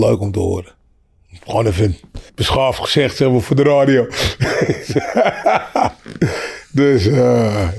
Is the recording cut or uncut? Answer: cut